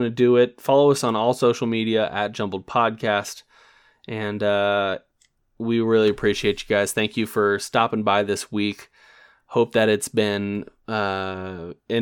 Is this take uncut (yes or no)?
yes